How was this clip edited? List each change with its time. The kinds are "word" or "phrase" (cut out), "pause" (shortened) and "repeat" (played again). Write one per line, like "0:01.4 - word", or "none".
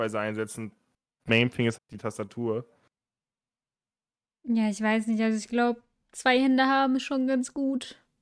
0:01.8 - word